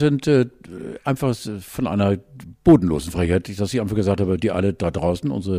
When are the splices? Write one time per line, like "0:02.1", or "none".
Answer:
none